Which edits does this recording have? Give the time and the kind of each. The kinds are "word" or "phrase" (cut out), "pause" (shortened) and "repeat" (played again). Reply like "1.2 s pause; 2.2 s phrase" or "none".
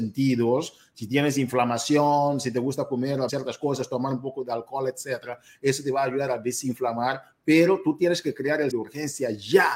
3.3 s word; 8.7 s word